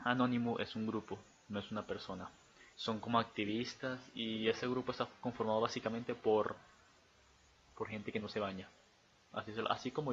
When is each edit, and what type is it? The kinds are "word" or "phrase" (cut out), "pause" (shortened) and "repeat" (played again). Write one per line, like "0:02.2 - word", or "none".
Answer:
0:02.7 - pause